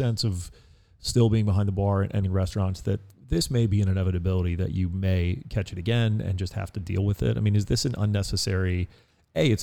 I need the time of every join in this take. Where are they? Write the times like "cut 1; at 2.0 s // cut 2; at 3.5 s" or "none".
cut 1; at 2.2 s